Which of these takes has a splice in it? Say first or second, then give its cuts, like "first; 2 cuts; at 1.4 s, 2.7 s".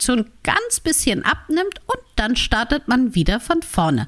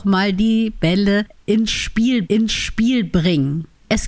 second; 1 cut; at 2.2 s